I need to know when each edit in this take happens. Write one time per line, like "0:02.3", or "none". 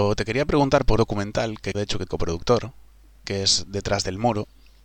0:01.0
0:01.7
0:02.1